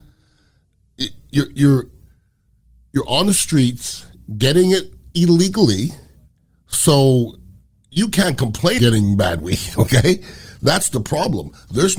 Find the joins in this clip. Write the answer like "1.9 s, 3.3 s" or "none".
8.8 s